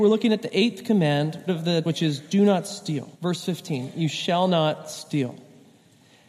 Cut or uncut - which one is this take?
cut